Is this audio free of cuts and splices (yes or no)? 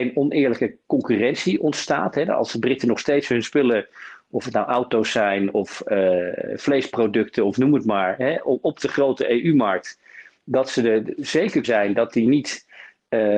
no